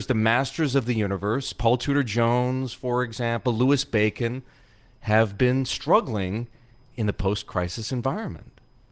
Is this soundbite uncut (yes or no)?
yes